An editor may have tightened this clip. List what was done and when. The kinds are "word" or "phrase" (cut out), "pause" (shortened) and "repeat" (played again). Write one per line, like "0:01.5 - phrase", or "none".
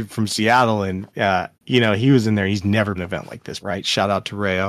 0:01.5 - pause
0:03.0 - phrase
0:03.6 - word